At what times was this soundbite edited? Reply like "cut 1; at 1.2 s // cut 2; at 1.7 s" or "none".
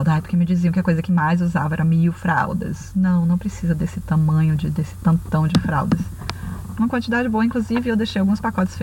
none

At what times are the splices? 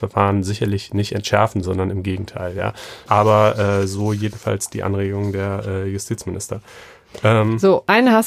cut 1; at 3.1 s

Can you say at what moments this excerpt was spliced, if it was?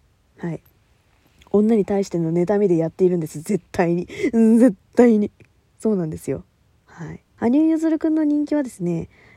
cut 1; at 7.3 s

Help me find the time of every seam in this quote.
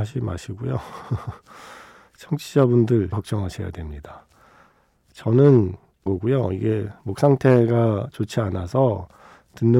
cut 1; at 3.1 s // cut 2; at 6.1 s

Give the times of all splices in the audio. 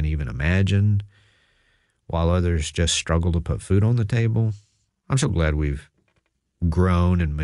none

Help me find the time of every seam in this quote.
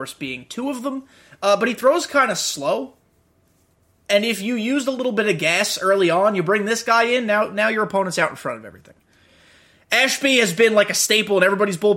none

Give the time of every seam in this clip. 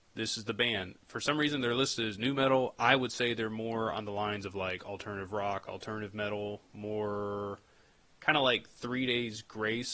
none

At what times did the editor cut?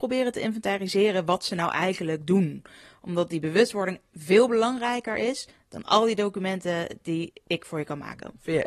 none

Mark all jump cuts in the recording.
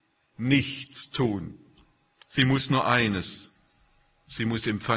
none

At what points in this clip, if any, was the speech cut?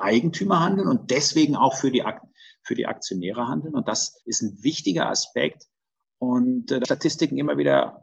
cut 1; at 4.2 s // cut 2; at 6.8 s

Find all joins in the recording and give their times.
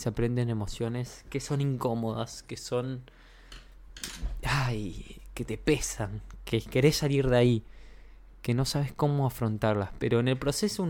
none

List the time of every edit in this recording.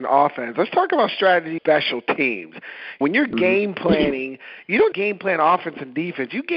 cut 1; at 1.6 s // cut 2; at 3.0 s // cut 3; at 4.9 s

